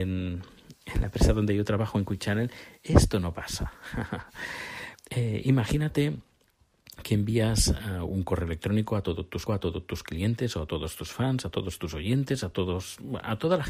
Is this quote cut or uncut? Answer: cut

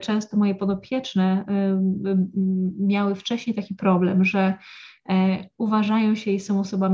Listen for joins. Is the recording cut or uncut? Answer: uncut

